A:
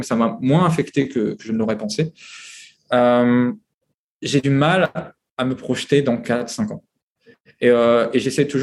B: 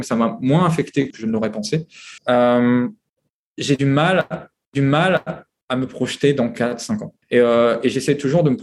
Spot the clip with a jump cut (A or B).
B